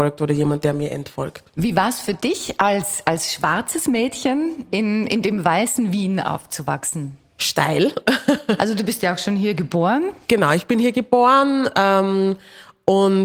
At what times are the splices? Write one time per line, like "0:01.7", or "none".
none